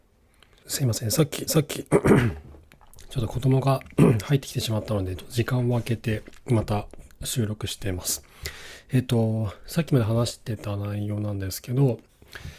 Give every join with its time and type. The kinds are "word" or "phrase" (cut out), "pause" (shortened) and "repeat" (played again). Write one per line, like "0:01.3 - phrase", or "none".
0:01.5 - repeat

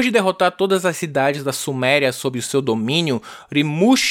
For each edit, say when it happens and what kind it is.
none

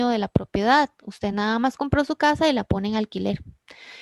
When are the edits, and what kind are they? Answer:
none

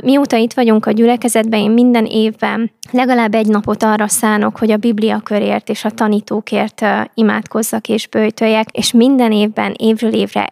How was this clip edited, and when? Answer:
none

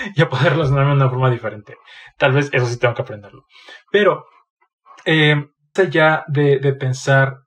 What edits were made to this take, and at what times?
0:05.8 - word

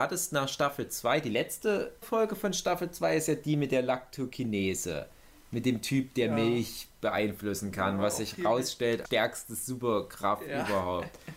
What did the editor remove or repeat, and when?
0:02.0 - word
0:09.0 - word

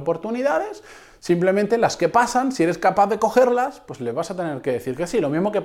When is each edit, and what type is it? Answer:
none

